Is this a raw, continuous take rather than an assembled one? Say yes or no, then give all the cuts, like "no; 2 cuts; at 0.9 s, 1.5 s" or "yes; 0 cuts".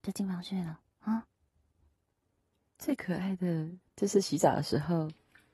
yes; 0 cuts